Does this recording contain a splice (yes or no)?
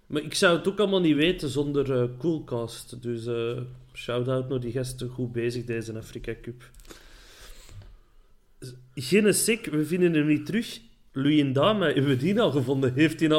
no